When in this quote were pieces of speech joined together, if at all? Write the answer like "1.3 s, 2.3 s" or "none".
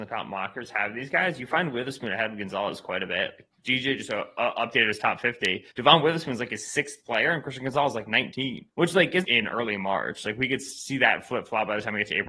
5.7 s, 8.7 s, 9.2 s